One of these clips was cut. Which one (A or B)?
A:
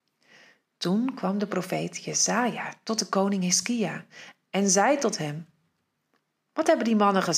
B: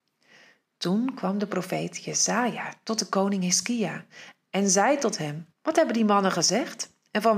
B